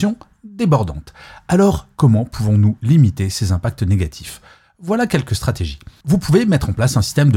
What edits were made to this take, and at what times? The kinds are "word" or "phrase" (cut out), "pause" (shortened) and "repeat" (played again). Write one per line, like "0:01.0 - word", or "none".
none